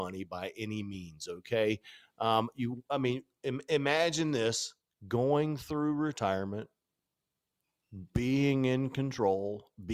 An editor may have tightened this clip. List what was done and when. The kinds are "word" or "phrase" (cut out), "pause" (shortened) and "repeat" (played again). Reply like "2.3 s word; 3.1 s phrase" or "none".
none